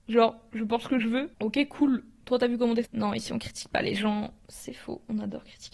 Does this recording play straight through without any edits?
no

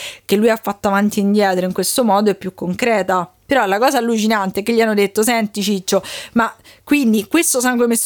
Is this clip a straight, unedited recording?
yes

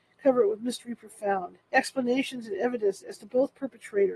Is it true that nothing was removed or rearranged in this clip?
no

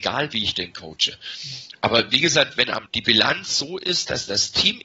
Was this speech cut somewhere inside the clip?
yes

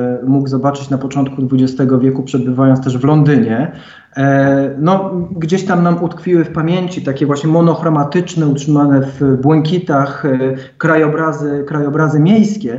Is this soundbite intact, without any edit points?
yes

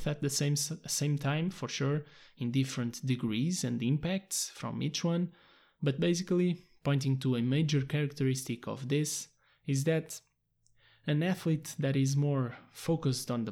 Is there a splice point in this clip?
no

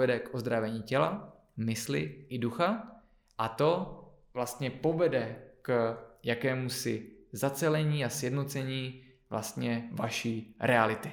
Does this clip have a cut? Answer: no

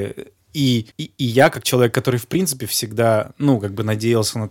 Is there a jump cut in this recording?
yes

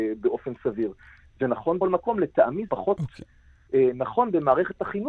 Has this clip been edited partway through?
yes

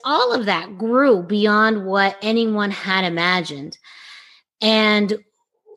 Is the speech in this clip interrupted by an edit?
no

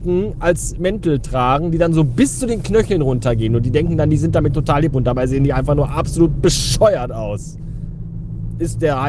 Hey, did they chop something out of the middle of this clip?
no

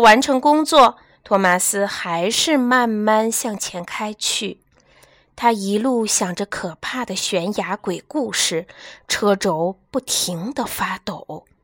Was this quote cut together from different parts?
no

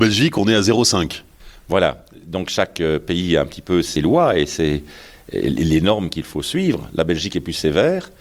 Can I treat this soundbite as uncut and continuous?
yes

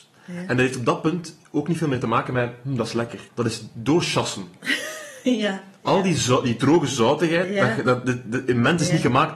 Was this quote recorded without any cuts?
no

